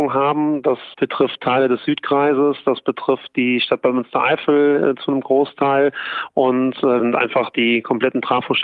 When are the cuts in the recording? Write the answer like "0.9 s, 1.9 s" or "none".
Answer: 0.9 s, 7.0 s